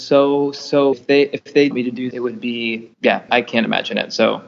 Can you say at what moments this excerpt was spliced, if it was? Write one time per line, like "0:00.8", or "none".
0:00.9
0:01.7
0:02.1
0:02.9
0:03.3